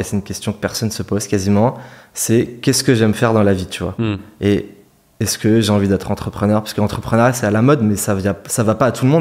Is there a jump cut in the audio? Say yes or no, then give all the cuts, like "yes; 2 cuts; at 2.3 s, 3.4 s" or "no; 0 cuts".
no; 0 cuts